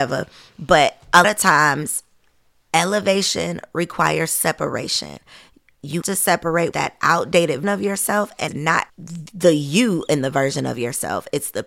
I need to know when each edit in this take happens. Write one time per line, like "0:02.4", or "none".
0:01.2
0:06.0
0:06.7
0:07.6
0:08.5
0:08.9